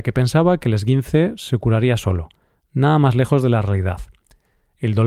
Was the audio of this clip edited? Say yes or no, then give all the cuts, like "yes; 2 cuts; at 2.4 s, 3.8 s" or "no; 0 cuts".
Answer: no; 0 cuts